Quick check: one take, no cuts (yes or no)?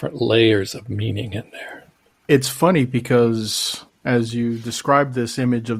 no